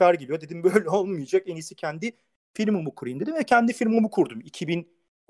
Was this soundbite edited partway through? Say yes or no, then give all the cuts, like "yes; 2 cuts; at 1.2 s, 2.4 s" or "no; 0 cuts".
no; 0 cuts